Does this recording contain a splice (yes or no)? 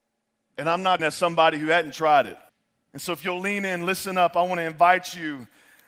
yes